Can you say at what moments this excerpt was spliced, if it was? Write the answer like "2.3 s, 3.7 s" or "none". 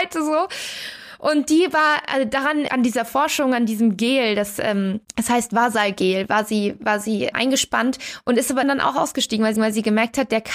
2.7 s, 5.0 s, 7.3 s, 8.6 s, 9.6 s